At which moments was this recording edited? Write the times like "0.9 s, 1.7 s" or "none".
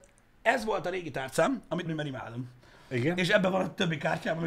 1.9 s